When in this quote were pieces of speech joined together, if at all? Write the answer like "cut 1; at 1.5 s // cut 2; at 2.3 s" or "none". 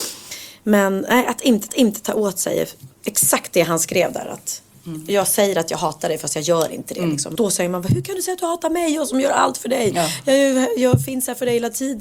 cut 1; at 1.7 s // cut 2; at 7.4 s